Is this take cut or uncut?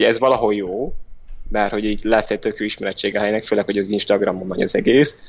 uncut